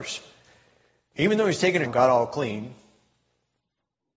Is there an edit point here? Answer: yes; 1 cut; at 1.8 s

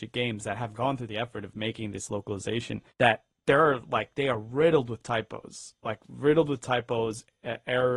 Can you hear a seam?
yes; 1 cut; at 2.9 s

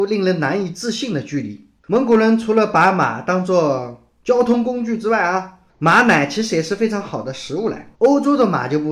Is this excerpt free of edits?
no; 3 cuts; at 1.8 s, 5.7 s, 7.9 s

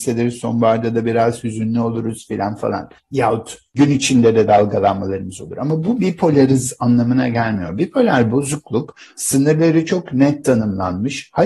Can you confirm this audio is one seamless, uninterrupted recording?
yes; 0 cuts

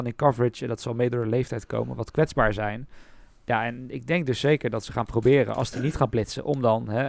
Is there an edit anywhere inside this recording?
no; 0 cuts

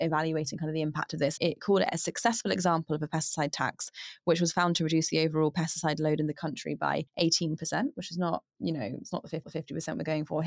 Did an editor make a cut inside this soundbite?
yes; 4 cuts; at 1.4 s, 7.1 s, 8.5 s, 9.4 s

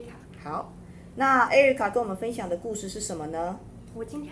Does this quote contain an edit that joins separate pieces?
no; 0 cuts

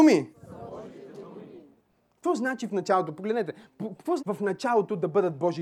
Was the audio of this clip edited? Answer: yes; 1 cut; at 4.2 s

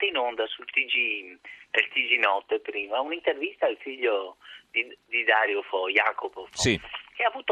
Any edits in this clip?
no; 0 cuts

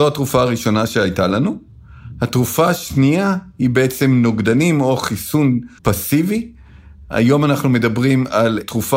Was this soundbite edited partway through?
yes; 1 cut; at 5.8 s

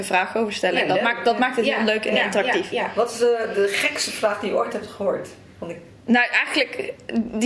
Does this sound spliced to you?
no; 0 cuts

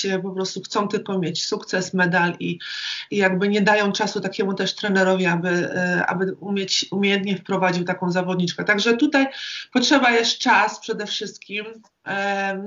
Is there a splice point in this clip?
no; 0 cuts

